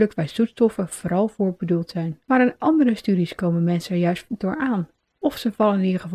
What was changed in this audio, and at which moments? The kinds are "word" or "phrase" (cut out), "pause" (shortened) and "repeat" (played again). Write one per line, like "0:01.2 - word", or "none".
0:02.2 - pause
0:05.0 - pause